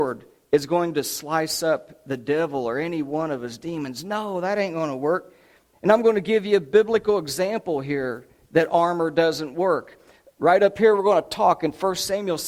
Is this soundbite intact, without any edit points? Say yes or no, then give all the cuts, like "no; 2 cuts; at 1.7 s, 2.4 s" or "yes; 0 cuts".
yes; 0 cuts